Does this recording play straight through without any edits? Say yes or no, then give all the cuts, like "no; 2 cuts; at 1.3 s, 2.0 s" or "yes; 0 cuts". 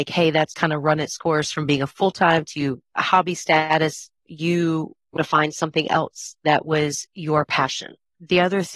no; 2 cuts; at 4.2 s, 5.2 s